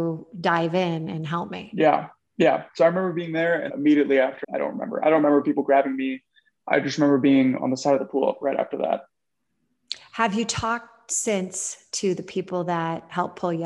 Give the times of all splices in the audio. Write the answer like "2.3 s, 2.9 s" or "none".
3.7 s, 4.4 s